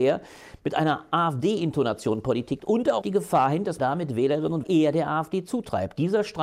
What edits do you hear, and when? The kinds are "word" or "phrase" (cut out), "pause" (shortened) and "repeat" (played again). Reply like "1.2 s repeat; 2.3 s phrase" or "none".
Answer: 2.6 s word; 3.0 s word; 3.8 s word; 4.6 s word